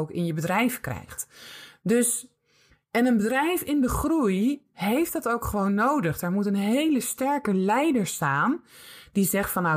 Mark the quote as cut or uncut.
uncut